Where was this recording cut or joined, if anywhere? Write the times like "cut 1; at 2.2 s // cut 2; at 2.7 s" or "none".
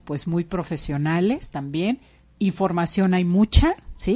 none

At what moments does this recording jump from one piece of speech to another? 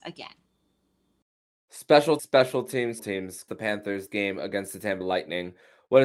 cut 1; at 2.2 s // cut 2; at 3.0 s // cut 3; at 3.5 s // cut 4; at 4.1 s // cut 5; at 5.0 s

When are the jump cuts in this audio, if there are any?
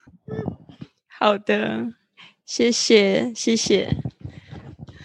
none

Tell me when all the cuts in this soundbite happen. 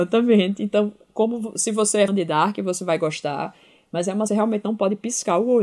cut 1; at 2.1 s // cut 2; at 4.3 s

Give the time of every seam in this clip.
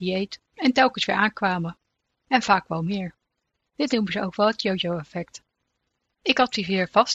none

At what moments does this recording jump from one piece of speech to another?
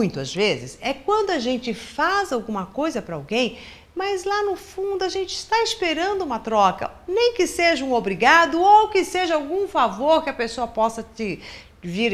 none

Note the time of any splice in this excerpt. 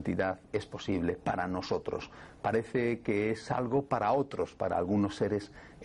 none

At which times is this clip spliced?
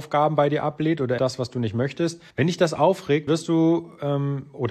cut 1; at 1.2 s // cut 2; at 2.3 s // cut 3; at 3.3 s

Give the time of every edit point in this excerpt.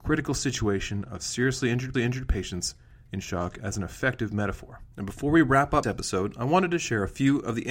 cut 1; at 1.9 s // cut 2; at 4.9 s // cut 3; at 5.8 s

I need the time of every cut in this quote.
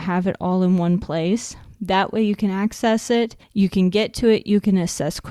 cut 1; at 3.4 s

